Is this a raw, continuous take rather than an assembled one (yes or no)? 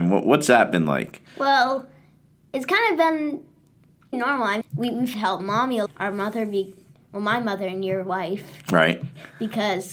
no